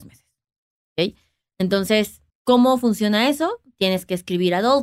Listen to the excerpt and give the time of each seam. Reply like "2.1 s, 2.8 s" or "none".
2.3 s

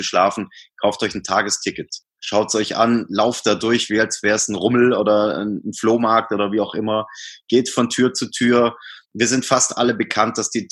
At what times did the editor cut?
9.0 s

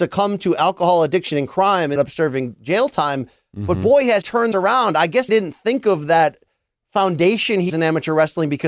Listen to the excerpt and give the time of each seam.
2.0 s, 4.2 s, 4.5 s, 5.3 s, 7.7 s

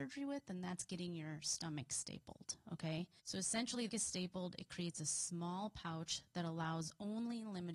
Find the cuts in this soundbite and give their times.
3.2 s, 3.9 s

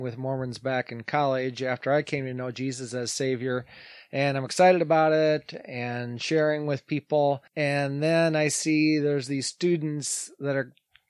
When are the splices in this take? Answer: 7.5 s

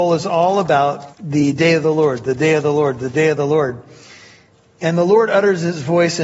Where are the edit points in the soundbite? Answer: 1.1 s

